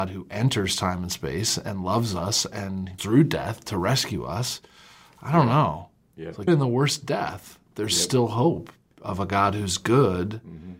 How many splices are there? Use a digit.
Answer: 2